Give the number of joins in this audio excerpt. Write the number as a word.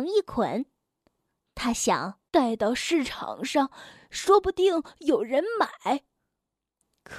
one